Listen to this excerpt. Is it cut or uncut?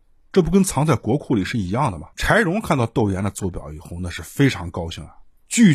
cut